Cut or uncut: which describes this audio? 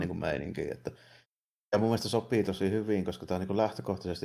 uncut